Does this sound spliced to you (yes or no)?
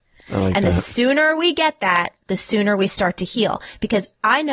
no